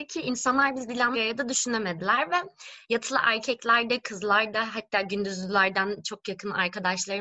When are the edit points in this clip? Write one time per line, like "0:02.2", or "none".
0:01.1